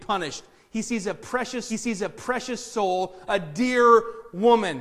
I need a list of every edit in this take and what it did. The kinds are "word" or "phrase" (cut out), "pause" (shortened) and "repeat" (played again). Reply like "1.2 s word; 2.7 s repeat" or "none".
1.7 s repeat

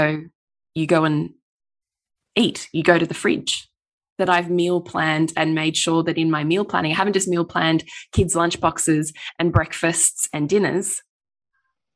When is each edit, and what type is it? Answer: none

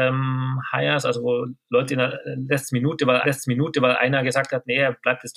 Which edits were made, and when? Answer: 3.2 s repeat

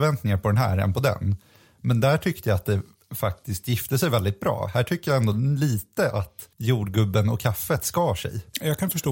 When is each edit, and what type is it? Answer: none

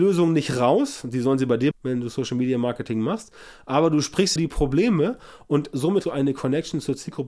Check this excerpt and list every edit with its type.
1.7 s word; 4.4 s word; 6.0 s word

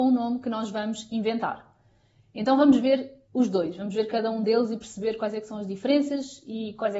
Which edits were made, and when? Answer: 3.2 s pause

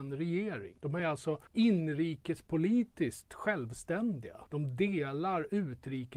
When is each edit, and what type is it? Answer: none

